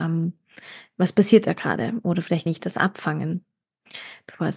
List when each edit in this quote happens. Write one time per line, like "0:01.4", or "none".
0:02.5